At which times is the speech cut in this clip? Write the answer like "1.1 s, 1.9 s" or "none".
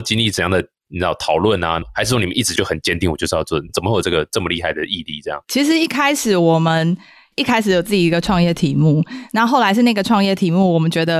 none